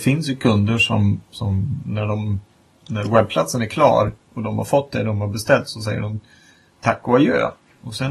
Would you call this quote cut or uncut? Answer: uncut